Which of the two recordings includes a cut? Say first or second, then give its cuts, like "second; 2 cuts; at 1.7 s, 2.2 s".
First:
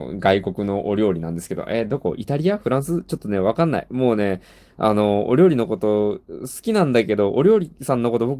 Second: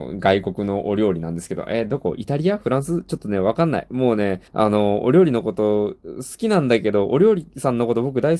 second; 1 cut; at 4.5 s